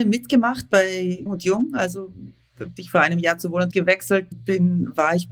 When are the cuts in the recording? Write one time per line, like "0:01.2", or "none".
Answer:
0:01.3
0:02.8
0:03.7
0:04.3

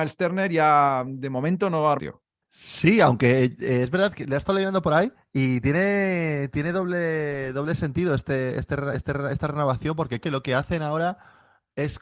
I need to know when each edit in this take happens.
0:02.0
0:04.1
0:05.1
0:08.9
0:10.2

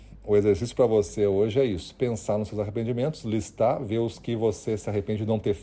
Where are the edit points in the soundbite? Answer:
none

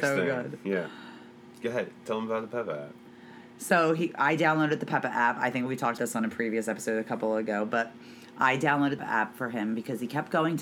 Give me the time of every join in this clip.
0:06.0
0:09.0

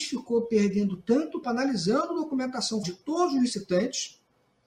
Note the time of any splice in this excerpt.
0:01.4
0:02.8

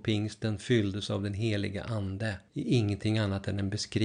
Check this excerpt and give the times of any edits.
0:02.5

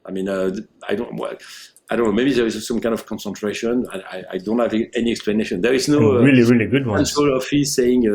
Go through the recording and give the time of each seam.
none

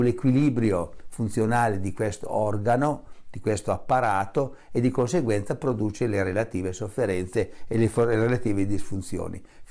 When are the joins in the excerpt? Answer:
none

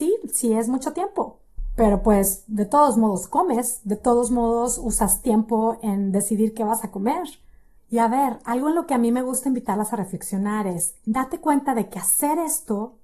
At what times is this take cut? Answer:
none

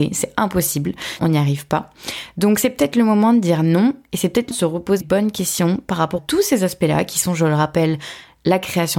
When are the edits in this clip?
0:01.2
0:04.5
0:05.0
0:06.2

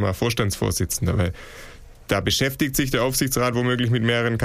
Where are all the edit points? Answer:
none

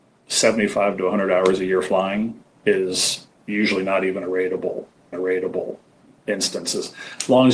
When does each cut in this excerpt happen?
0:05.1

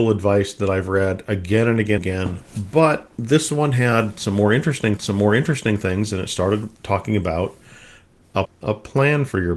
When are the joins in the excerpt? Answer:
0:02.0
0:03.1
0:05.0
0:06.7
0:08.4

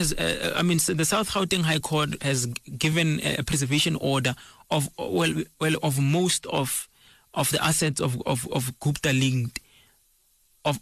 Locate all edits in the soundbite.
none

